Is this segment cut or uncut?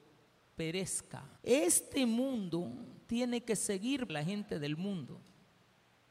cut